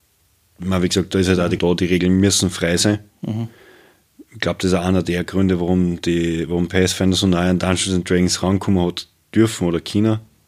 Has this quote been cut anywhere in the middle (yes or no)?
yes